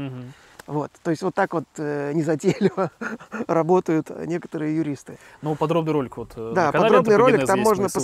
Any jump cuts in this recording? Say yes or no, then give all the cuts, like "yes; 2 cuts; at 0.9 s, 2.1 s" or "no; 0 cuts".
no; 0 cuts